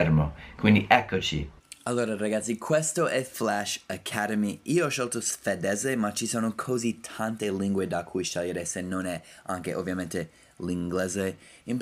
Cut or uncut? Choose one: uncut